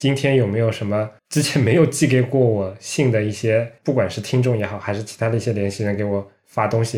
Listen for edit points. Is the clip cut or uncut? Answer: cut